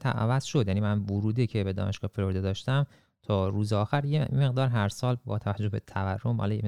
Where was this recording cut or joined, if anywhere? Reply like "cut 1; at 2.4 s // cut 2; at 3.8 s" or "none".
none